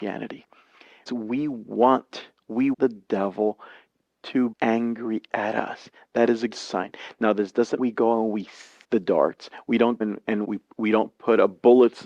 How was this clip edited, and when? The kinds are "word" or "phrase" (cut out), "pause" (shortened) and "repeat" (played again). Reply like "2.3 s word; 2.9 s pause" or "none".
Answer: 1.1 s word; 2.7 s word; 4.5 s word; 6.5 s word; 7.8 s word; 8.8 s word; 10.0 s word; 10.4 s word